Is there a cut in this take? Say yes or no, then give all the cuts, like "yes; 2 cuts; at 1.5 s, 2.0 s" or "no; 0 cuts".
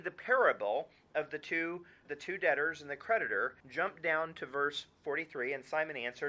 yes; 2 cuts; at 2.0 s, 3.6 s